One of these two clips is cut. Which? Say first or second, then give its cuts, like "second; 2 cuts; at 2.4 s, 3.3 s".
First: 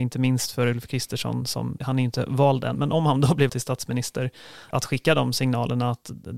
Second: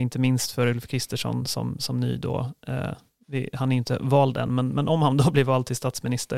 first; 4 cuts; at 1.8 s, 2.7 s, 3.5 s, 4.7 s